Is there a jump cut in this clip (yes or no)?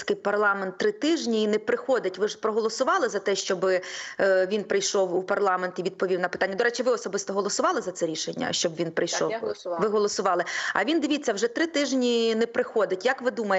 no